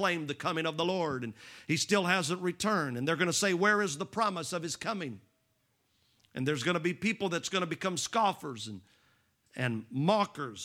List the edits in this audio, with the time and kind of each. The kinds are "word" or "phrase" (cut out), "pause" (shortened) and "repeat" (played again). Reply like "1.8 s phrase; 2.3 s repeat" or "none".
none